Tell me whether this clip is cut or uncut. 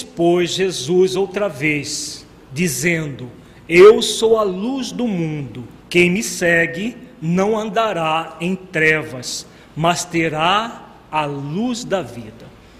cut